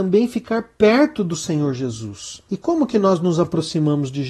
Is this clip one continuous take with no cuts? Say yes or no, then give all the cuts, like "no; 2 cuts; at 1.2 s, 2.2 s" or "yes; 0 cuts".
yes; 0 cuts